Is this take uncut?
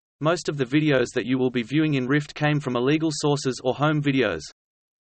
yes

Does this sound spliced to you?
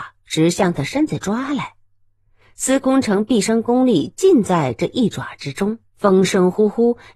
yes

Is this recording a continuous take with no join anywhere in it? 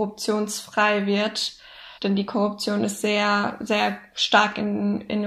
no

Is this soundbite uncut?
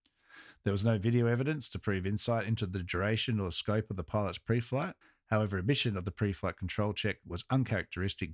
no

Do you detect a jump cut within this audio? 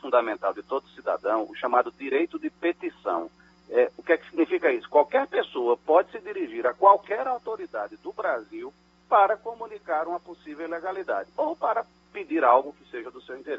no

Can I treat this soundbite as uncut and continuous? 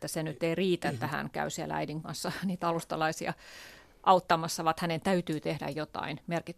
yes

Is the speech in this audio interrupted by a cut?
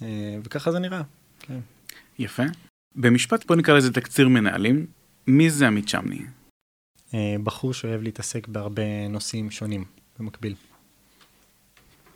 yes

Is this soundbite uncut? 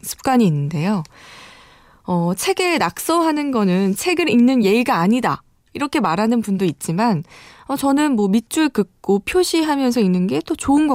yes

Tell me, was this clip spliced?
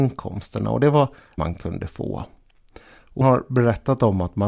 yes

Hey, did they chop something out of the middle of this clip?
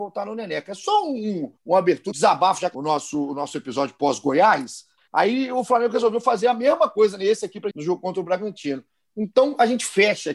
yes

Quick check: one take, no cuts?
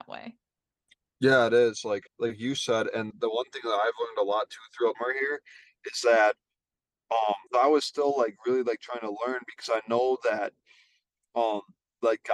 no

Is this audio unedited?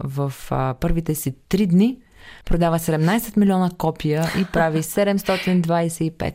no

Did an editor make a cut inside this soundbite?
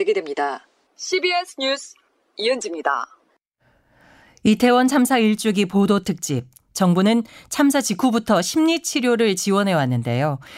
no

